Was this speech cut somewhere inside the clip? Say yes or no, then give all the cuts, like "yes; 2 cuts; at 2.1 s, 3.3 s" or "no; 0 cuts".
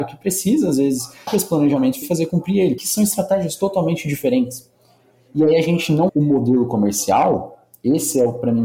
yes; 4 cuts; at 1.3 s, 2.0 s, 2.8 s, 6.1 s